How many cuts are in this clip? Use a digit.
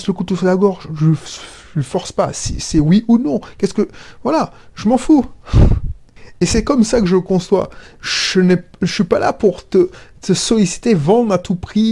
0